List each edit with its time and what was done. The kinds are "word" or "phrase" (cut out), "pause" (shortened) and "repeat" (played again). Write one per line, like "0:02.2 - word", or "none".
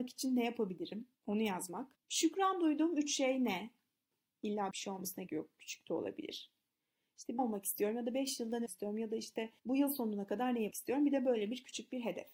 0:01.2 - pause
0:02.0 - pause
0:04.7 - word
0:05.3 - word
0:07.4 - phrase
0:08.7 - word
0:09.6 - pause
0:10.7 - word